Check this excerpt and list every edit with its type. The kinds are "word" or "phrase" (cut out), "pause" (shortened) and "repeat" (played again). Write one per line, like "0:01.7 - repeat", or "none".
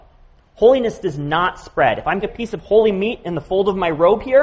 0:02.2 - word